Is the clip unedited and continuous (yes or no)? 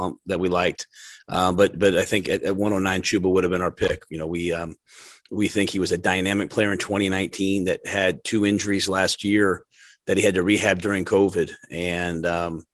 yes